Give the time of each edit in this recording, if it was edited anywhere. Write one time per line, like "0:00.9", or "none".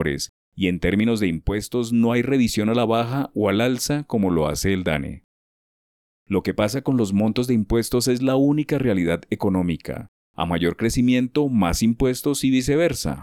none